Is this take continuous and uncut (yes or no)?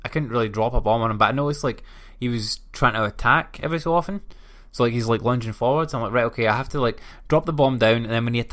yes